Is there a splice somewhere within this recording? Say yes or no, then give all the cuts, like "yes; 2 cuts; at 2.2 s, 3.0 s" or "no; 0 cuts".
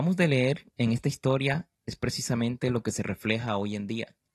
no; 0 cuts